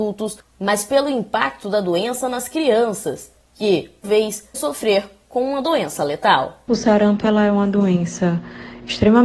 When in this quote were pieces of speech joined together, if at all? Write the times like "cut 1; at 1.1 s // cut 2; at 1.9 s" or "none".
cut 1; at 4.0 s // cut 2; at 4.5 s